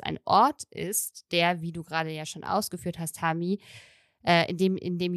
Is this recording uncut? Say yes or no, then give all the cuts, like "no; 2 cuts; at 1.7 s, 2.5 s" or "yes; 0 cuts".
yes; 0 cuts